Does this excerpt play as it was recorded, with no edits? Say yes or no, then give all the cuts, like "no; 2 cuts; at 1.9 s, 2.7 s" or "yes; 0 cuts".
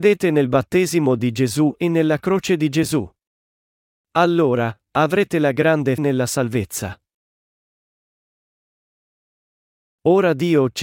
no; 1 cut; at 6.0 s